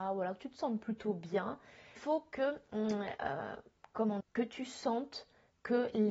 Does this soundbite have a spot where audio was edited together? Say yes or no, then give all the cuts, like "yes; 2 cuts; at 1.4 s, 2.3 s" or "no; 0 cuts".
yes; 2 cuts; at 2.0 s, 4.2 s